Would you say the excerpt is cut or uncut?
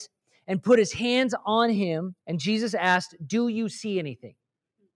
cut